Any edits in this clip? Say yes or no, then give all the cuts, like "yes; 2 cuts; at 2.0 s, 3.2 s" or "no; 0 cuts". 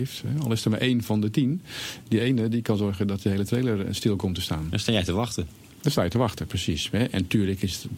no; 0 cuts